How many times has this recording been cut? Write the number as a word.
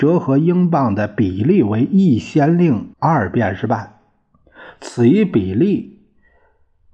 one